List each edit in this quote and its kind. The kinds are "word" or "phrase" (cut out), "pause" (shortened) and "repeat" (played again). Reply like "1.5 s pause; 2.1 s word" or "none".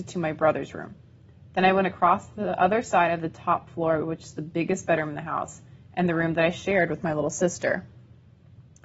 none